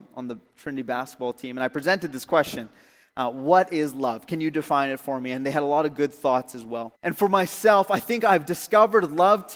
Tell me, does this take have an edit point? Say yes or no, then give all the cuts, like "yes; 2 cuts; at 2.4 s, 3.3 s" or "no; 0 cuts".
yes; 1 cut; at 6.9 s